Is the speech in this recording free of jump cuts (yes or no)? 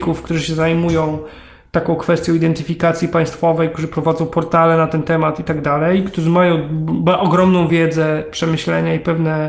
yes